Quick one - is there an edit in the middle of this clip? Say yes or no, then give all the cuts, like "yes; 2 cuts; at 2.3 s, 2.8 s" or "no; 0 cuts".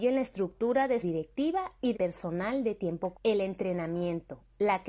yes; 3 cuts; at 1.0 s, 1.9 s, 3.1 s